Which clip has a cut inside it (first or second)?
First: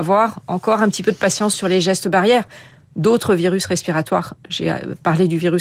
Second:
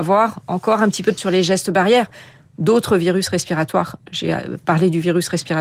second